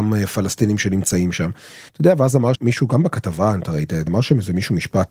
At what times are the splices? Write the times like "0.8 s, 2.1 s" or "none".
1.9 s, 2.6 s, 4.1 s